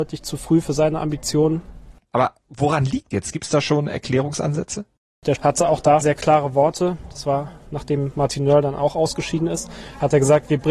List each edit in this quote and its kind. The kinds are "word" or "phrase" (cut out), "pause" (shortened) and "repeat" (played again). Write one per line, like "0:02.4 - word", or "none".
0:03.1 - word
0:05.4 - word
0:06.0 - word